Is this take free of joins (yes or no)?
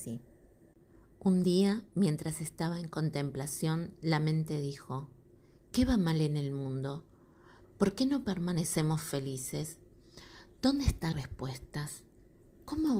no